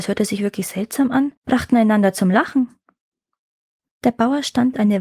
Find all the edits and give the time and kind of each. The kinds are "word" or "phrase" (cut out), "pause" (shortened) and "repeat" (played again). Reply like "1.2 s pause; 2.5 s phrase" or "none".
1.4 s pause

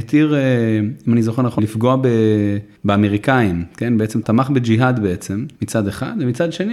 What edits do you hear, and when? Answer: 1.6 s word; 4.2 s word; 5.5 s pause

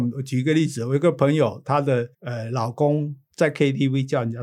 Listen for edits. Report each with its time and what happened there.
2.1 s pause

